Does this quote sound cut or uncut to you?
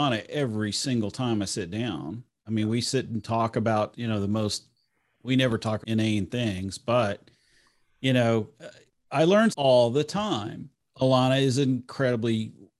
cut